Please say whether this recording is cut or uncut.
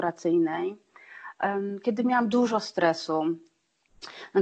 uncut